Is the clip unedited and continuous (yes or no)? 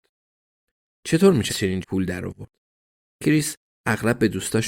no